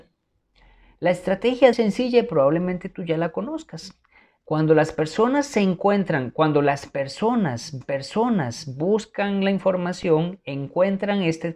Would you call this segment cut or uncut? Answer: cut